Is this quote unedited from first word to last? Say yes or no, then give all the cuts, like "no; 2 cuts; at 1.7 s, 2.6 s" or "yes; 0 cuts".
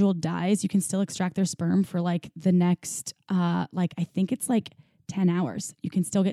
yes; 0 cuts